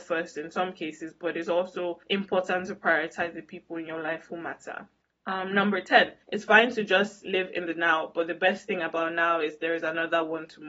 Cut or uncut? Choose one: cut